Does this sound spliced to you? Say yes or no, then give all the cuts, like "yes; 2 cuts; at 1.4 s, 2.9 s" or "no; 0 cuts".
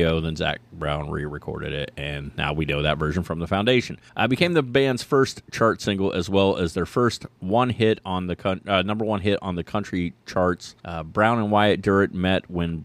yes; 2 cuts; at 4.1 s, 10.8 s